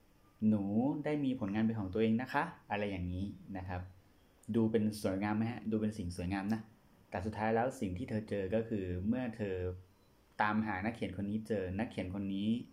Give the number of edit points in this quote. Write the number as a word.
one